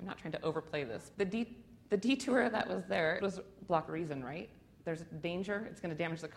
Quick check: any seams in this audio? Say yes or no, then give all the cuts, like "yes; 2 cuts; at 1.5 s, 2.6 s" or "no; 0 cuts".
yes; 3 cuts; at 1.1 s, 3.2 s, 3.9 s